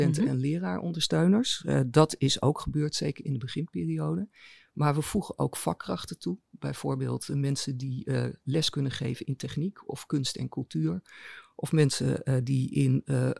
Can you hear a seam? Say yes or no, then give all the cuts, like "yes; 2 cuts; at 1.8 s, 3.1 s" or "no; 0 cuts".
no; 0 cuts